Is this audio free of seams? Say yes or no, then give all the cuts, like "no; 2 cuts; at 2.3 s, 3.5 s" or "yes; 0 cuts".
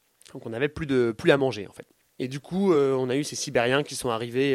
yes; 0 cuts